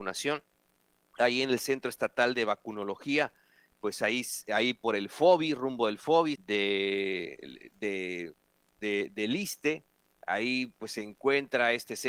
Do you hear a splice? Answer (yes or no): yes